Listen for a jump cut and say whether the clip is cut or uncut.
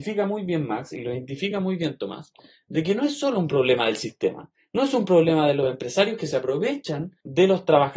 uncut